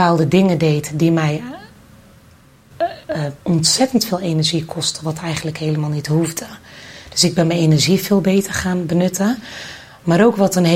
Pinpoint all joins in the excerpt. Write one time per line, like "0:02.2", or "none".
0:03.4